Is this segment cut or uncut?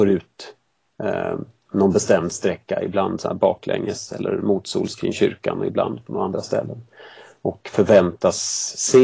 uncut